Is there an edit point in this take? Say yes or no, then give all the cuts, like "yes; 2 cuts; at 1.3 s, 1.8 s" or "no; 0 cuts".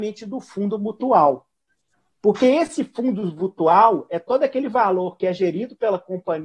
no; 0 cuts